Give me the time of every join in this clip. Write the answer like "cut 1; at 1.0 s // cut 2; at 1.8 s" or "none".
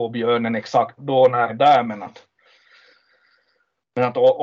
cut 1; at 1.0 s // cut 2; at 1.5 s